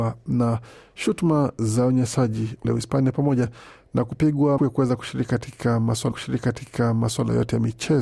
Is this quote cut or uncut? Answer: cut